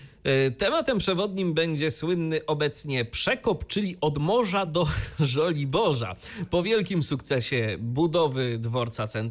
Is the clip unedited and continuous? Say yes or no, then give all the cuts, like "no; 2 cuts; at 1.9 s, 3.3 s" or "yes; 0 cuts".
yes; 0 cuts